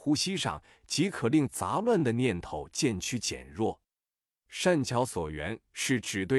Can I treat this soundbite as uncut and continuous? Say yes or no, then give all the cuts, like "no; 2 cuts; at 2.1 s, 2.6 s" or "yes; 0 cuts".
yes; 0 cuts